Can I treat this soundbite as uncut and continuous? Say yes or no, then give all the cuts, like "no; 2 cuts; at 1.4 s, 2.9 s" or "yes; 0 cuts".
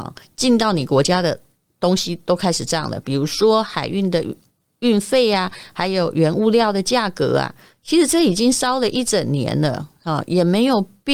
yes; 0 cuts